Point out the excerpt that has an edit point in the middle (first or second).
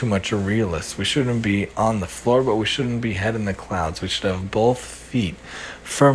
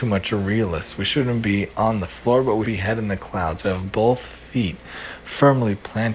second